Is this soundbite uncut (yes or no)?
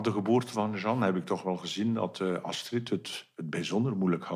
yes